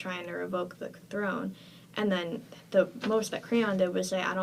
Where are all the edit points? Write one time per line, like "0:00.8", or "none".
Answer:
none